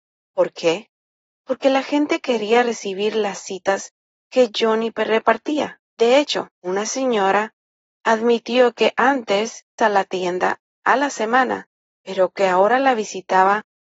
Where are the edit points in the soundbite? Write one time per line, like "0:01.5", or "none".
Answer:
0:05.9
0:06.5
0:09.8